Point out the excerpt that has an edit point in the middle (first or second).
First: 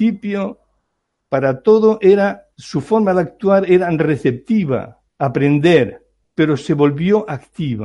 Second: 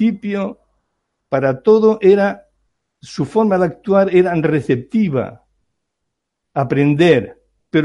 first